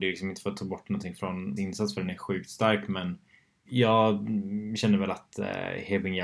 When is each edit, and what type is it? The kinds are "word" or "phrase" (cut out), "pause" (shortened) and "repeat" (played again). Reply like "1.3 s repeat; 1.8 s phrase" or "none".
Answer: 1.6 s word; 3.6 s word